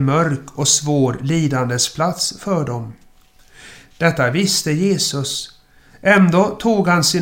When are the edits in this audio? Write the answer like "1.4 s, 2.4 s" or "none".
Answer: none